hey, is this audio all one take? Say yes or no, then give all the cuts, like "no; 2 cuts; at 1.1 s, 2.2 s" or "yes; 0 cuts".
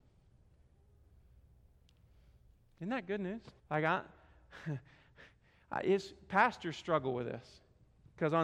no; 1 cut; at 3.6 s